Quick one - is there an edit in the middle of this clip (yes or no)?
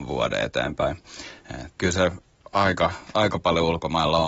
yes